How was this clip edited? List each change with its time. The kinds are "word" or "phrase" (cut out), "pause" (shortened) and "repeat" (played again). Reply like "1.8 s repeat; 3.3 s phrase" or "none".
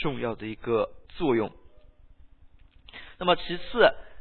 1.1 s pause